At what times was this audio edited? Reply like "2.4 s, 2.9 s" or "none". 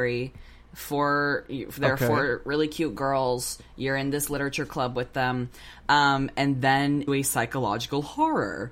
7.1 s